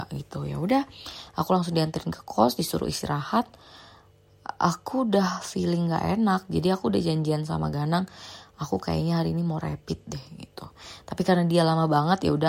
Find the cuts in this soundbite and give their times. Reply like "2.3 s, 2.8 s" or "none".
none